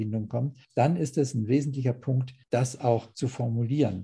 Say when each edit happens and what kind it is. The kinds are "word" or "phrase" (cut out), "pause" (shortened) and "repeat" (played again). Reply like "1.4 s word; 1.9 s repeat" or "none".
none